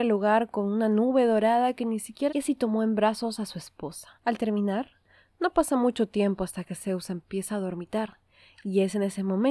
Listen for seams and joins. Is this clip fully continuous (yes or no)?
no